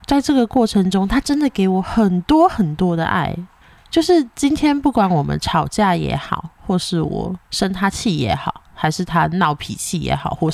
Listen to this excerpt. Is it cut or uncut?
cut